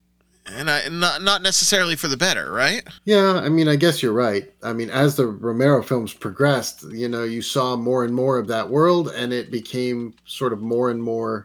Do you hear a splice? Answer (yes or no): yes